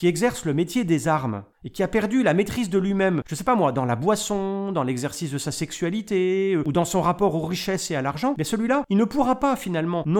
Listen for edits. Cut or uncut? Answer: cut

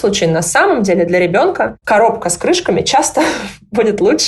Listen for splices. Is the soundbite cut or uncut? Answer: uncut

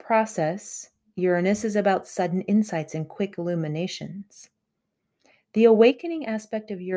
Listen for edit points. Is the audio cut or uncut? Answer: uncut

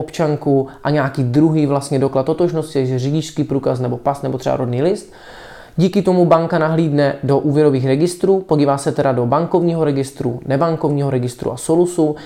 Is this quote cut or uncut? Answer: uncut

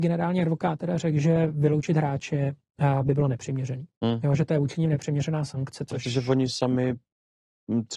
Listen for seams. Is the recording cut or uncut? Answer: uncut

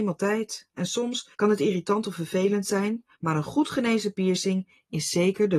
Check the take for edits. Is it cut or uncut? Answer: cut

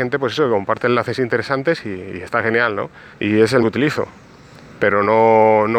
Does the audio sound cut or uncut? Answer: cut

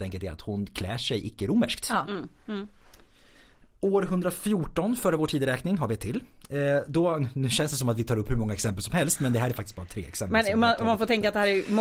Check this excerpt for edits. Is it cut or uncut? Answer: uncut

